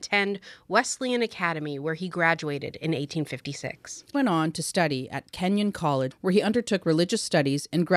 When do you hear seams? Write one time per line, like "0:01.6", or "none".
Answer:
0:04.1
0:06.1